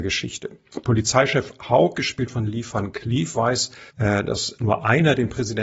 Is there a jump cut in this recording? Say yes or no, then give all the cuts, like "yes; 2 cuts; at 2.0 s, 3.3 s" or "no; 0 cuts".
yes; 1 cut; at 3.9 s